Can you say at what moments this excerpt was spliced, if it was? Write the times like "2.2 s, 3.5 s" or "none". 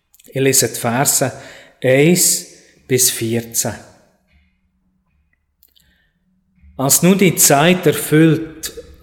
none